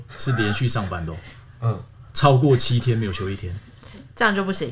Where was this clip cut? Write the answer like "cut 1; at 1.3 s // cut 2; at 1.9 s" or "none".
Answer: cut 1; at 2.1 s

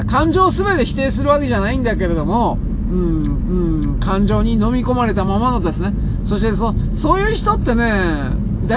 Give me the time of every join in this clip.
cut 1; at 3.4 s

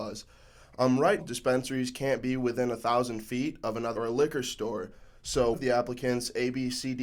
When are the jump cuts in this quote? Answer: cut 1; at 1.2 s // cut 2; at 4.0 s // cut 3; at 5.5 s

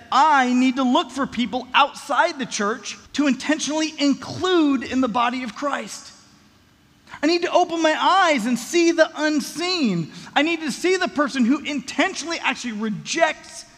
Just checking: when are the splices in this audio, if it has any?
cut 1; at 3.1 s

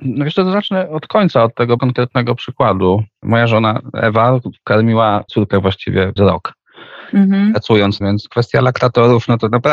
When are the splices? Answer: cut 1; at 1.8 s // cut 2; at 5.3 s // cut 3; at 6.2 s // cut 4; at 8.0 s

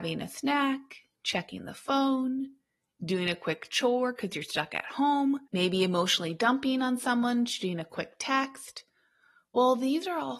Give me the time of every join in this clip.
cut 1; at 5.5 s

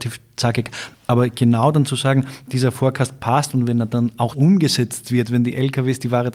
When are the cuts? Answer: cut 1; at 4.3 s

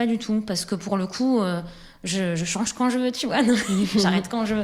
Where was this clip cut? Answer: none

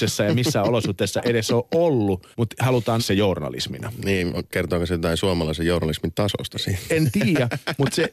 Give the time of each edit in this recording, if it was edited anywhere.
cut 1; at 2.3 s // cut 2; at 3.0 s

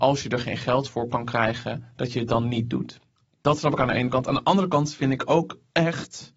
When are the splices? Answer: none

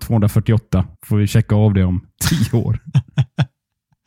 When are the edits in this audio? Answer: cut 1; at 1.0 s

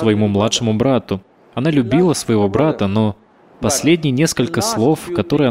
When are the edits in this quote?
none

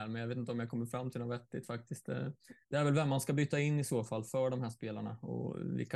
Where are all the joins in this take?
cut 1; at 2.6 s

